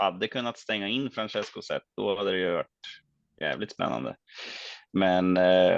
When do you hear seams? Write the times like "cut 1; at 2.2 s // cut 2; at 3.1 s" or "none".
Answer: none